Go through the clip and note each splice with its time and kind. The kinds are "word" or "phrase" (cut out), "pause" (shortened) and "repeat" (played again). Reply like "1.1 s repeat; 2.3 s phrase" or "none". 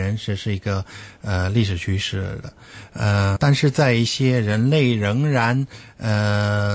3.4 s word